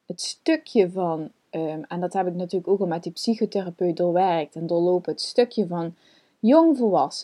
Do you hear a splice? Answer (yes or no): no